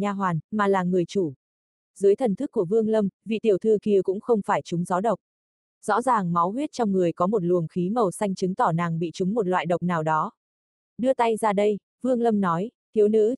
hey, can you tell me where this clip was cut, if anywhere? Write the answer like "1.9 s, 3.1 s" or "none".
none